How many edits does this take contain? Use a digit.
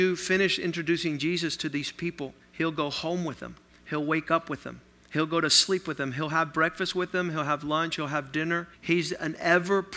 4